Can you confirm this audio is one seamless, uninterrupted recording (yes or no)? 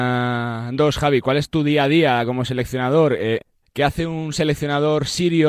yes